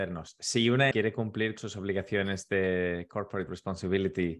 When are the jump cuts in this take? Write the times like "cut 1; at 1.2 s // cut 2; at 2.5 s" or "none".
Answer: cut 1; at 0.9 s // cut 2; at 1.6 s // cut 3; at 3.5 s